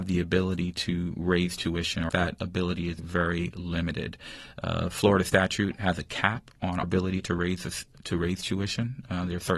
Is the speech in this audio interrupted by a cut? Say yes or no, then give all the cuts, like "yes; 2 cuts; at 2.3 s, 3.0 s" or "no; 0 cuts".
yes; 3 cuts; at 2.1 s, 3.0 s, 6.8 s